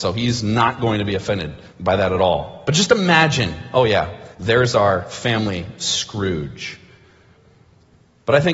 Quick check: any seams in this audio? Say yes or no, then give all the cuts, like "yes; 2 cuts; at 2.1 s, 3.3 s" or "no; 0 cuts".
yes; 2 cuts; at 1.7 s, 4.3 s